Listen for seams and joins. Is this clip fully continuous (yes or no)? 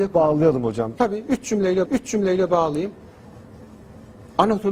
no